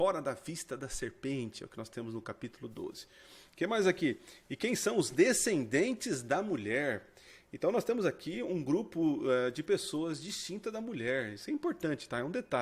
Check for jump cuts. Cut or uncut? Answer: uncut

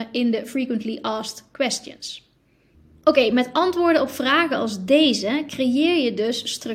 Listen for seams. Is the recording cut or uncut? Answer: uncut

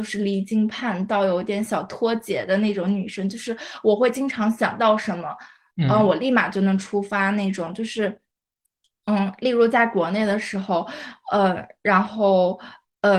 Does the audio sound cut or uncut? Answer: uncut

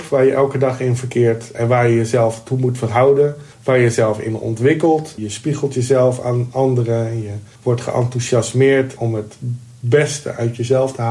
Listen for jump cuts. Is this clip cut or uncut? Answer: cut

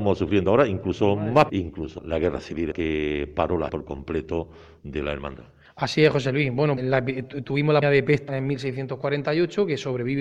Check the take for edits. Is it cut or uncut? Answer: cut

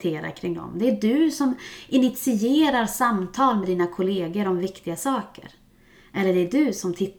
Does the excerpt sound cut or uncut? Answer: uncut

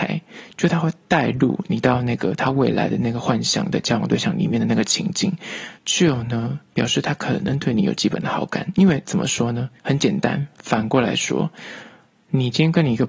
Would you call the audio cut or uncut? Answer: cut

